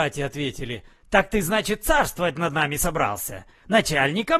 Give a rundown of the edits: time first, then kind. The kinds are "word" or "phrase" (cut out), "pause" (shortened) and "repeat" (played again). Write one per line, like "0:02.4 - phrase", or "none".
none